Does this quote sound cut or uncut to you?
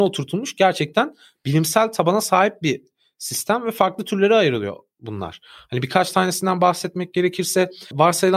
uncut